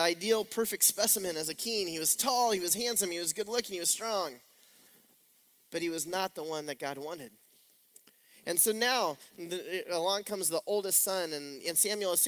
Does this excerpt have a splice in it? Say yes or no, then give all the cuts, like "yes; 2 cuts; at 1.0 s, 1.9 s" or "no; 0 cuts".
no; 0 cuts